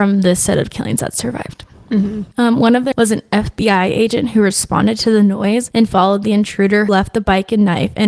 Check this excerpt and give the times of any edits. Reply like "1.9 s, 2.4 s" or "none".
2.9 s, 6.9 s